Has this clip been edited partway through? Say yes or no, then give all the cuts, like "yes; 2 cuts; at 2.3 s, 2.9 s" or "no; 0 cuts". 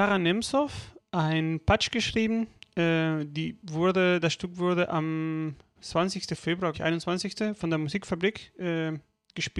yes; 2 cuts; at 5.8 s, 6.7 s